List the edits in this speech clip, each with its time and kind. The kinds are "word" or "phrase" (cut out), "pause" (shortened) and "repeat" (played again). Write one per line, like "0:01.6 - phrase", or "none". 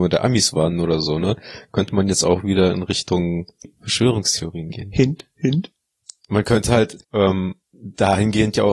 0:07.0 - pause